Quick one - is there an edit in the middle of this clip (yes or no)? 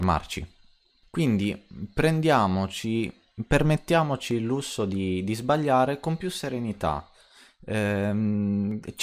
no